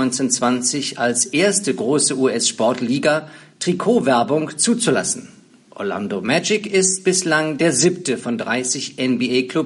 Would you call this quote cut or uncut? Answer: uncut